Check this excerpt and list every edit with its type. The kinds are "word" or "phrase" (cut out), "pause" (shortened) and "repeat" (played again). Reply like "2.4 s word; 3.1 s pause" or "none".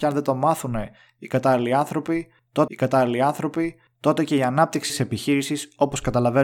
2.7 s repeat; 4.9 s word